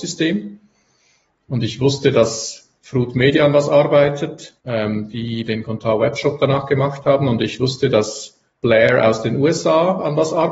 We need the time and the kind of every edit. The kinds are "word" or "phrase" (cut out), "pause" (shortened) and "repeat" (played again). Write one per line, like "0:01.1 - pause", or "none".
0:02.8 - pause
0:04.6 - pause
0:08.5 - pause